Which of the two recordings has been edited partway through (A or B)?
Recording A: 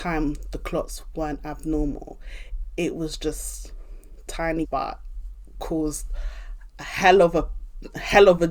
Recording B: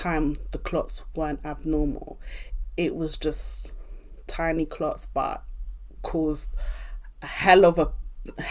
A